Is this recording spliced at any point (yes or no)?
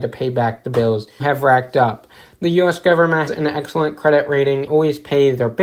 yes